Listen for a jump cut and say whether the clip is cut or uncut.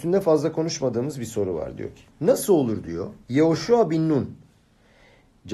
cut